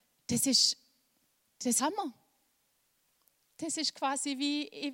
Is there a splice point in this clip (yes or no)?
yes